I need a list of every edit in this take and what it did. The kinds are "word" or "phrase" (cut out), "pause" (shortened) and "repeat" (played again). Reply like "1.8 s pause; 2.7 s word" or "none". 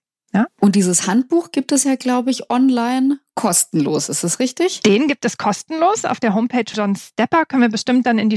6.7 s word